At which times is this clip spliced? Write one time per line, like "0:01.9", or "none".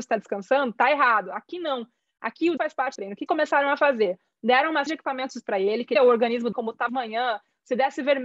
0:02.6
0:03.0
0:03.3
0:04.9
0:05.4
0:06.0
0:06.5
0:06.9

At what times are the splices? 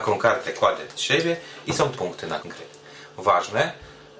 0:00.9
0:01.9
0:02.4

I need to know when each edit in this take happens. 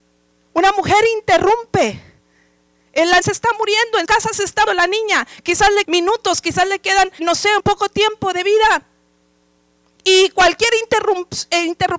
0:03.2
0:04.1
0:04.7
0:05.8
0:07.2
0:07.6

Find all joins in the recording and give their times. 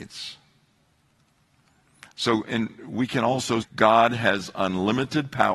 0:03.6

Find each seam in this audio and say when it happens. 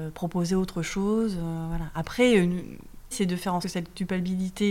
0:03.1
0:03.6

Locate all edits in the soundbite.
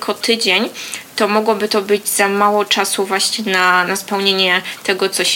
0:03.9

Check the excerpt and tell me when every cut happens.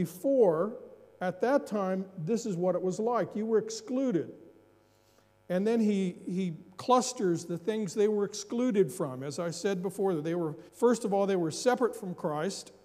0:10.7

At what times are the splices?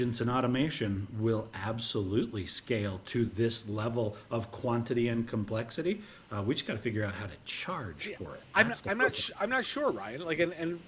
none

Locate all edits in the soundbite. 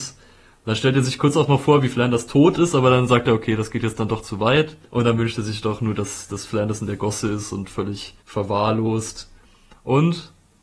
0:04.8
0:08.2

